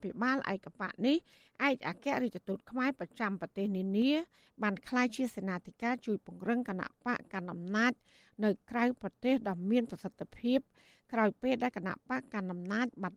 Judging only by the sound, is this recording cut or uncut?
uncut